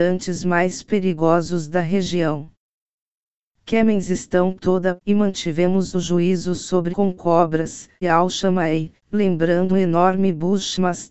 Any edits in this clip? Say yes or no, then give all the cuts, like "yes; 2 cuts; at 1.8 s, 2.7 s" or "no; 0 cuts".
yes; 6 cuts; at 4.6 s, 5.0 s, 5.9 s, 6.9 s, 8.0 s, 9.7 s